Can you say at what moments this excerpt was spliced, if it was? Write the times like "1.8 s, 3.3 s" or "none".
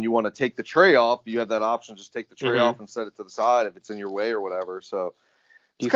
none

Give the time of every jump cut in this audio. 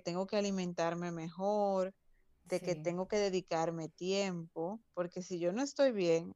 4.9 s

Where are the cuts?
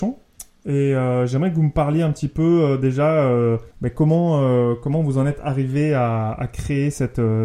3.7 s

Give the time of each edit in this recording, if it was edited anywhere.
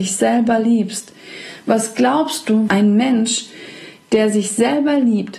2.7 s

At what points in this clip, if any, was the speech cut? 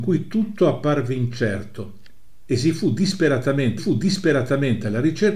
3.8 s

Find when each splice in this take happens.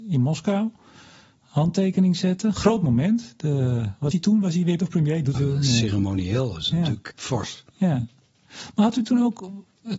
4.1 s, 4.8 s, 5.3 s, 7.1 s

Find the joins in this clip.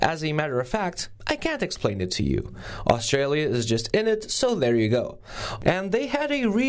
none

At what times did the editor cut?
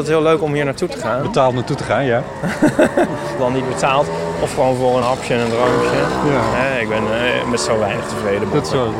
3.4 s, 5.0 s

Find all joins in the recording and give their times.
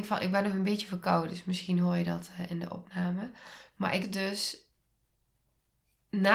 4.0 s

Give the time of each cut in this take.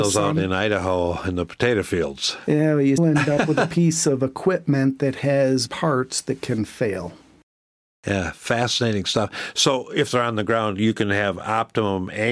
3.0 s, 5.7 s

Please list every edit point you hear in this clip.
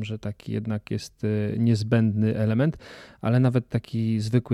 none

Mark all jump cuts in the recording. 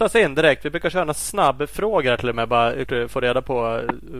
2.3 s, 2.9 s

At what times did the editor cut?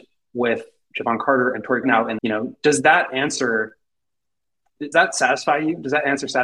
1.8 s, 2.2 s, 4.9 s

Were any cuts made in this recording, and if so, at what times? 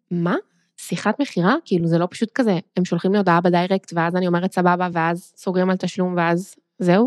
none

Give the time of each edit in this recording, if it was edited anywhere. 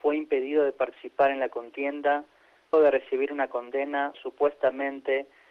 2.7 s, 4.1 s

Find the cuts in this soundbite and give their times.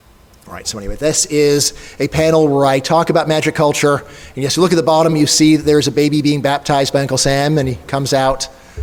none

